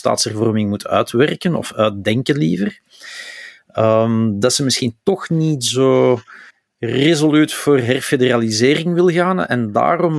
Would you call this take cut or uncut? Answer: uncut